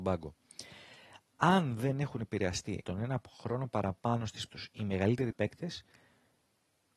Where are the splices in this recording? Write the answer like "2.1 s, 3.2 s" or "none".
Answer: 2.8 s, 4.5 s, 5.3 s